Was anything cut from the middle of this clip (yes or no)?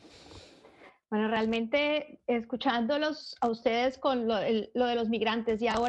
no